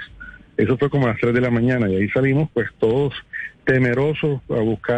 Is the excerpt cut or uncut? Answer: uncut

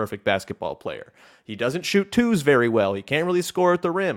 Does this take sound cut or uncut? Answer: uncut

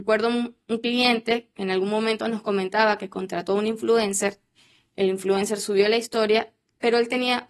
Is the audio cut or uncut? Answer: uncut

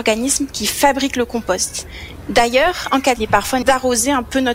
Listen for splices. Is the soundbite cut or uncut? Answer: cut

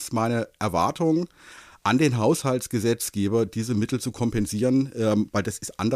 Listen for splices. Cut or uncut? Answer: uncut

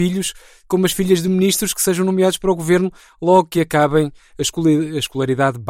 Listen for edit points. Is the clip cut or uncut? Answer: uncut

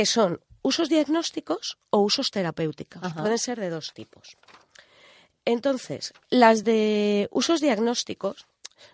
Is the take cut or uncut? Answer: uncut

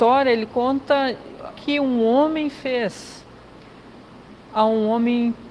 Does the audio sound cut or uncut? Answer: cut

